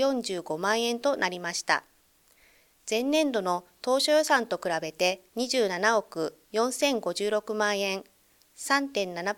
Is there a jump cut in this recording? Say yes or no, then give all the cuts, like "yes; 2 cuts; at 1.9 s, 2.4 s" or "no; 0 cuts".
yes; 2 cuts; at 5.3 s, 6.4 s